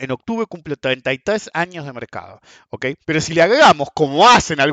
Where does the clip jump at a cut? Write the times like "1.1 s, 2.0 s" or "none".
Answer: 3.0 s

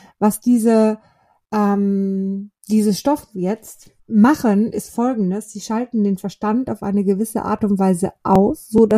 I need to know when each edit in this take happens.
2.6 s, 4.0 s

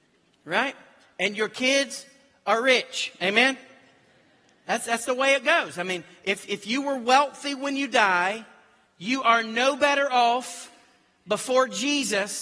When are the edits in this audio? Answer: none

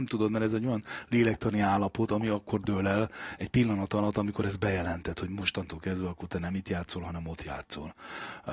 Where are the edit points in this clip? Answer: none

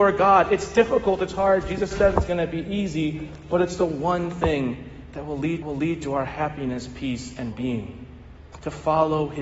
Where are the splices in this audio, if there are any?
1.9 s, 5.6 s, 7.5 s

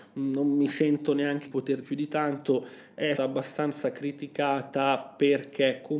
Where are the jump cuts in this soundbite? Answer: 1.5 s, 1.8 s, 3.2 s

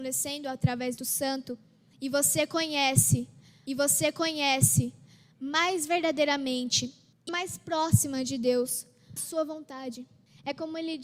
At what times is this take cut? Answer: 1.0 s, 3.7 s, 7.3 s, 9.2 s

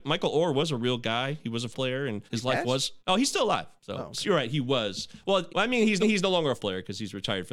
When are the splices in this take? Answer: 1.7 s, 2.3 s, 3.0 s, 3.8 s, 5.5 s, 6.0 s, 6.6 s

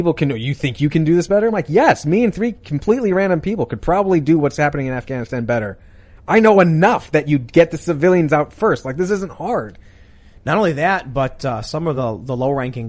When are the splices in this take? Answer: none

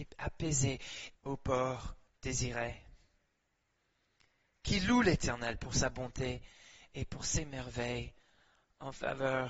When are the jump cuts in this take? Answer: 1.1 s, 2.1 s

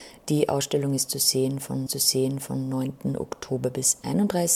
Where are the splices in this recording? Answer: 1.9 s

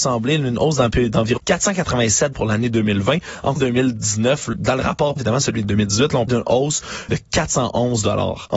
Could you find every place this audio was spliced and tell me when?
1.4 s, 2.3 s, 3.6 s, 4.5 s, 5.2 s, 5.6 s, 6.3 s, 7.1 s

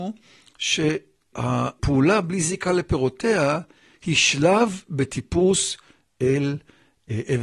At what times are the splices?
none

